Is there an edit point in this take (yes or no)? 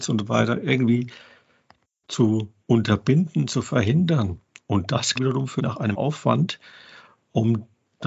yes